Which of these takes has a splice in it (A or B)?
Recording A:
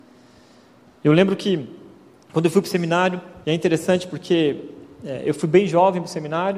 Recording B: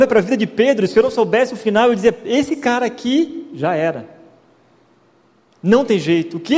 A